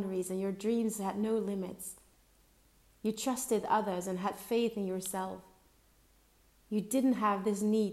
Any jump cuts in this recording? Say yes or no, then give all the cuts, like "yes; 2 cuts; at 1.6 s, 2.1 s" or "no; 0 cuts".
no; 0 cuts